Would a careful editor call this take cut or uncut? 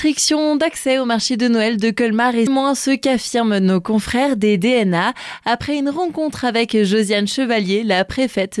cut